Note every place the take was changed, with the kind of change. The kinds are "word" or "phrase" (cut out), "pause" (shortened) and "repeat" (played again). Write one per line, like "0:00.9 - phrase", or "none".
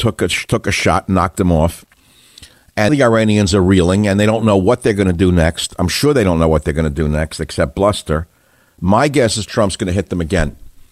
0:02.9 - word